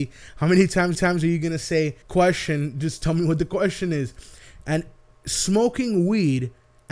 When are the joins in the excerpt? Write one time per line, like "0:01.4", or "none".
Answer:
0:00.9
0:02.0